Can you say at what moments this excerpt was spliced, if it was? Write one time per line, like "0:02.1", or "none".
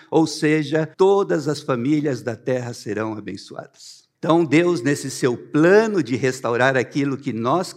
0:00.9
0:04.1